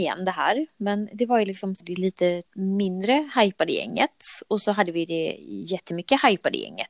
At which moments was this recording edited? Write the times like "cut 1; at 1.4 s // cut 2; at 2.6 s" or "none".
cut 1; at 1.8 s // cut 2; at 2.5 s

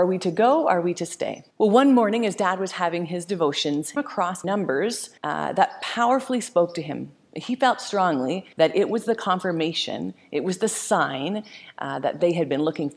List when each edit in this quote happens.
cut 1; at 1.5 s // cut 2; at 4.0 s // cut 3; at 4.4 s // cut 4; at 5.2 s // cut 5; at 8.5 s

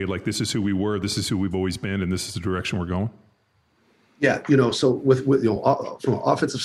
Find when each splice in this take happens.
none

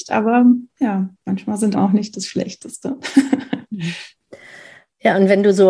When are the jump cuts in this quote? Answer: cut 1; at 1.7 s

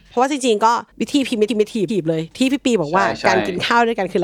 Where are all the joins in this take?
cut 1; at 0.9 s // cut 2; at 1.5 s // cut 3; at 1.9 s

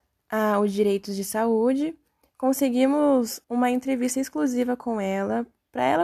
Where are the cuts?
cut 1; at 3.4 s

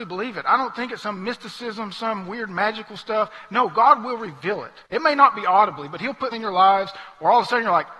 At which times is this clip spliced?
cut 1; at 4.9 s // cut 2; at 6.3 s

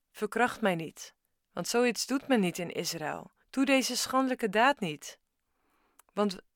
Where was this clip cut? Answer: cut 1; at 3.4 s

